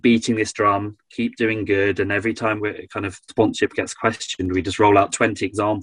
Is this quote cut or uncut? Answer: cut